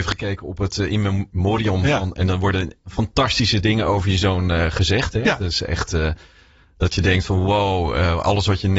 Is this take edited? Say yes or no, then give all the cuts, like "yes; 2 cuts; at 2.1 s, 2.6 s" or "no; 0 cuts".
no; 0 cuts